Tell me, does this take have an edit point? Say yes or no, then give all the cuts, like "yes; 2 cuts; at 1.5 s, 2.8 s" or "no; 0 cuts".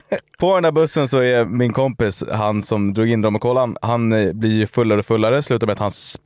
no; 0 cuts